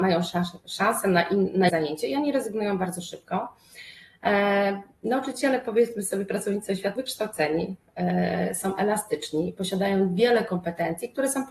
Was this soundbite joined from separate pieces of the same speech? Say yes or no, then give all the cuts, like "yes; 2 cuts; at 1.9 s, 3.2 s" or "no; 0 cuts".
yes; 2 cuts; at 1.7 s, 7.0 s